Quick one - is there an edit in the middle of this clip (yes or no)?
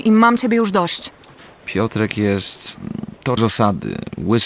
yes